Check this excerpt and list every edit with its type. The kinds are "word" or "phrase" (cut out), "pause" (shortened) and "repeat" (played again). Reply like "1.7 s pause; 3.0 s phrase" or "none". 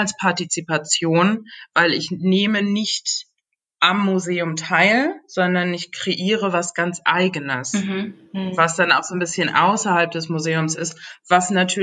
none